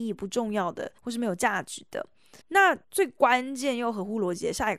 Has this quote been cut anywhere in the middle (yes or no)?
yes